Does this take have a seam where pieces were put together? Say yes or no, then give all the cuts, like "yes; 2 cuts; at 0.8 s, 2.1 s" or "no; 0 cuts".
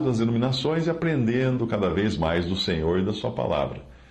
no; 0 cuts